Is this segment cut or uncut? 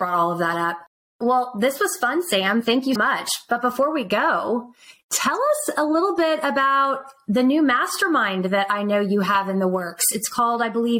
cut